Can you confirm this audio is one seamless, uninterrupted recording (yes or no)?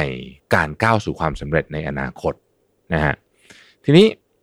yes